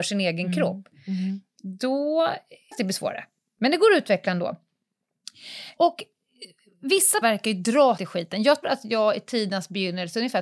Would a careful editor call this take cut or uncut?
cut